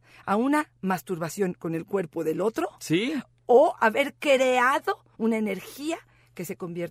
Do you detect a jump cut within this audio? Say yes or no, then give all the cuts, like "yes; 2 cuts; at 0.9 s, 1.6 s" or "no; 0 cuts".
yes; 2 cuts; at 3.8 s, 5.1 s